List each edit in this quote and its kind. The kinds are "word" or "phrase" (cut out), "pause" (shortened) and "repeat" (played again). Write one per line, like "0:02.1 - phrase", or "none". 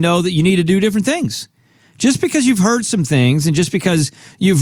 none